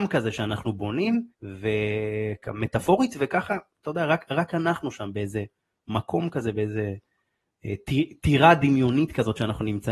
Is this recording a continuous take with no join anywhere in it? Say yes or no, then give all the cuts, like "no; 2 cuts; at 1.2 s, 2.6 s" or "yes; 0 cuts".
no; 1 cut; at 1.3 s